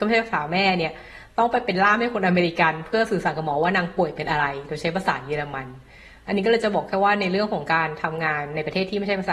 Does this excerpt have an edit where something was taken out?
no; 0 cuts

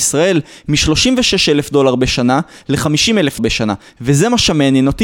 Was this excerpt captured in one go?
no; 1 cut; at 3.4 s

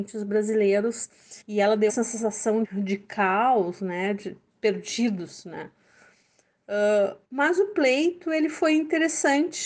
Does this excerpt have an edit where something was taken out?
yes; 5 cuts; at 1.4 s, 1.9 s, 2.6 s, 4.5 s, 7.2 s

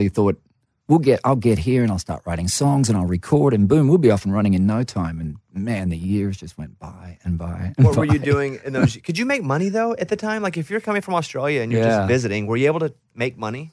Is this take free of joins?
yes; 0 cuts

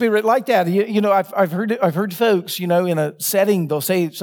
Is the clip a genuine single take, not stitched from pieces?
yes; 0 cuts

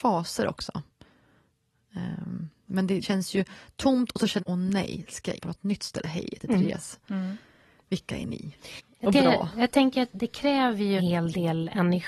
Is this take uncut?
no; 7 cuts; at 3.0 s, 4.4 s, 5.4 s, 6.0 s, 9.1 s, 10.1 s, 11.0 s

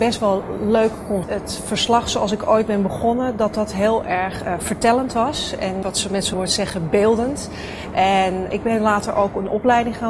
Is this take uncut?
no; 4 cuts; at 1.2 s, 5.8 s, 6.3 s, 8.5 s

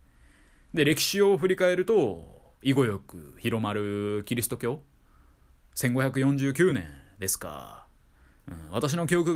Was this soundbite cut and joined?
no; 0 cuts

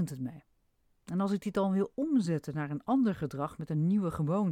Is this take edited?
no; 0 cuts

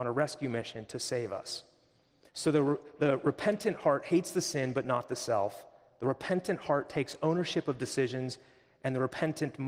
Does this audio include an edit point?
no; 0 cuts

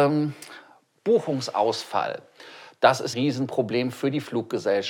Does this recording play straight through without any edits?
no; 1 cut; at 3.1 s

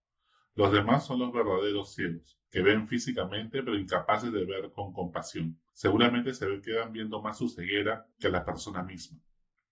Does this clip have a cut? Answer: yes; 3 cuts; at 2.5 s, 5.7 s, 8.1 s

